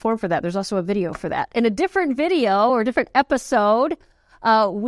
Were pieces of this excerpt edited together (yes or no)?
no